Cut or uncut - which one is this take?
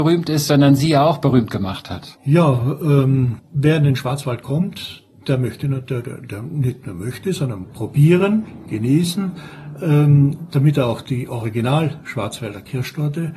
cut